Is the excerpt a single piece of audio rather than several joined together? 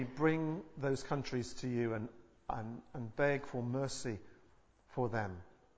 yes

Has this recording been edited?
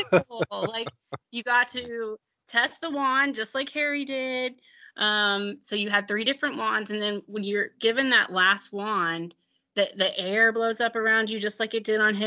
no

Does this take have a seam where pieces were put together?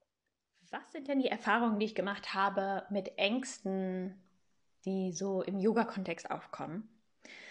no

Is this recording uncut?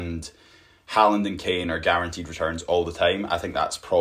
yes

